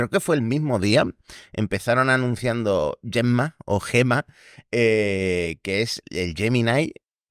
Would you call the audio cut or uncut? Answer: cut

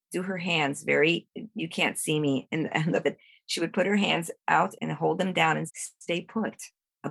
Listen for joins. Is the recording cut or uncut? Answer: cut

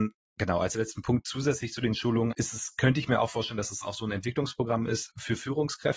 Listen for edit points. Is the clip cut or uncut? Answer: cut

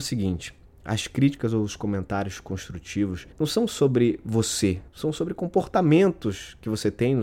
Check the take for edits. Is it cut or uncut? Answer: cut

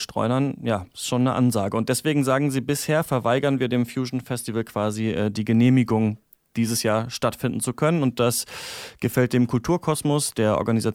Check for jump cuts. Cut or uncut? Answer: uncut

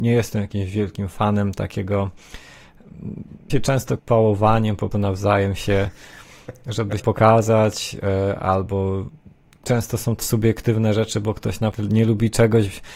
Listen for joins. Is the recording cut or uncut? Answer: cut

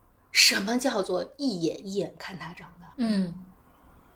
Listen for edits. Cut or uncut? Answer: cut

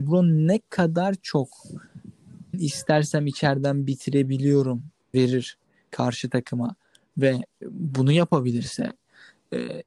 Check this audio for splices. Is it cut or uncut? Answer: cut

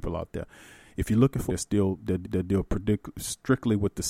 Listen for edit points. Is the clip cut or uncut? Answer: cut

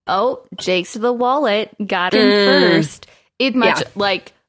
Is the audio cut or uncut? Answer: cut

